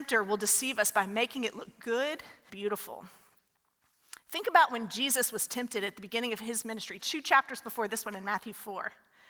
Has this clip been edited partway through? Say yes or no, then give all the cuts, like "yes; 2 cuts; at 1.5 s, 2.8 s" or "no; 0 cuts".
yes; 2 cuts; at 2.5 s, 7.0 s